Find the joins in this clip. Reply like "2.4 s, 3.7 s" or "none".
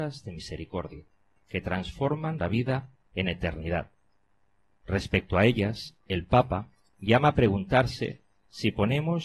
2.4 s